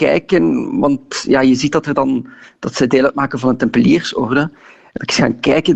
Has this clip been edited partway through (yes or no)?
no